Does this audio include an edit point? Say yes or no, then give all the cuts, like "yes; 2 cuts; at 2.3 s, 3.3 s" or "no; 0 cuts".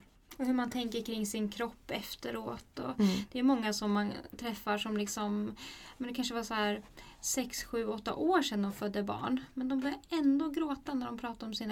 no; 0 cuts